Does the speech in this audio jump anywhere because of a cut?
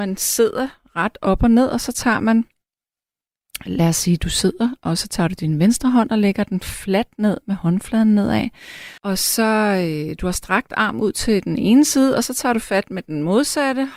yes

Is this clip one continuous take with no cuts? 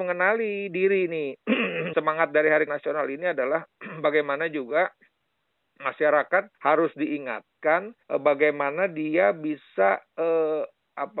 no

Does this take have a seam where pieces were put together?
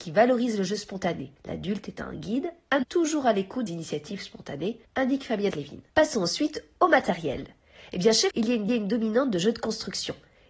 yes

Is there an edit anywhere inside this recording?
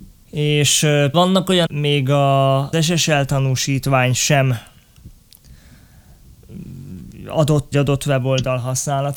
yes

